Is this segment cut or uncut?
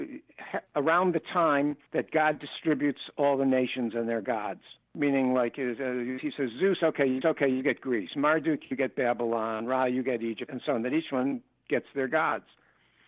cut